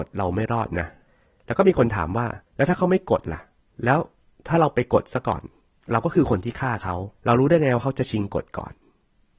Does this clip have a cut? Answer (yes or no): yes